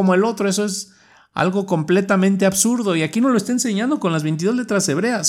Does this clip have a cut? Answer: no; 0 cuts

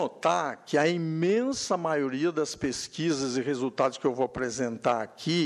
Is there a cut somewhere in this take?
no; 0 cuts

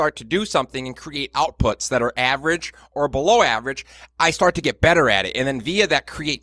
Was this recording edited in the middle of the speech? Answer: no; 0 cuts

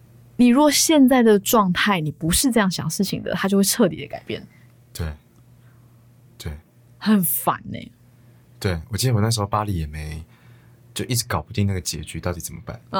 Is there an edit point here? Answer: no; 0 cuts

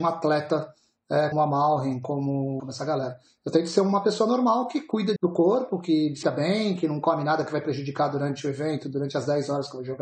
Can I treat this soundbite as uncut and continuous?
no; 4 cuts; at 1.3 s, 2.6 s, 5.2 s, 6.2 s

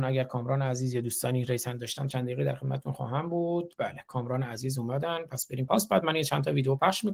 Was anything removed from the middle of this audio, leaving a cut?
yes; 1 cut; at 5.7 s

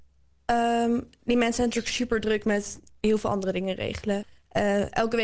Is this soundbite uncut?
yes; 0 cuts

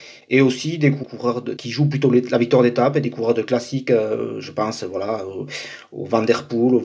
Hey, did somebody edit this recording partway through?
yes; 1 cut; at 1.6 s

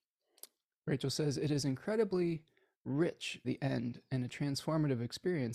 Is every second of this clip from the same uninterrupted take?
no; 1 cut; at 3.4 s

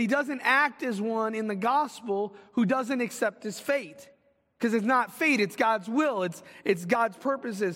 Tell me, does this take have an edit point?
no; 0 cuts

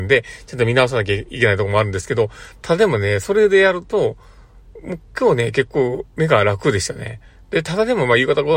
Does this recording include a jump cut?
no; 0 cuts

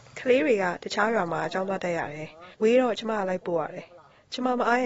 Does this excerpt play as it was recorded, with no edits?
no; 1 cut; at 2.5 s

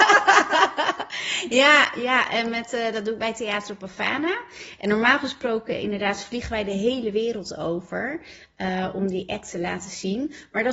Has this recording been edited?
no; 0 cuts

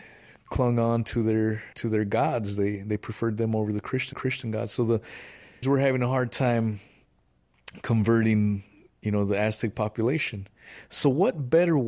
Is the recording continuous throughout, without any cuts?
no; 3 cuts; at 1.7 s, 4.1 s, 5.6 s

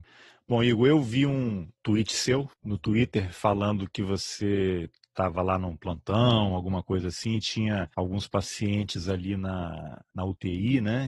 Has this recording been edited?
no; 0 cuts

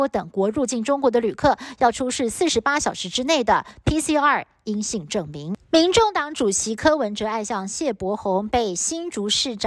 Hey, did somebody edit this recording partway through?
yes; 1 cut; at 5.6 s

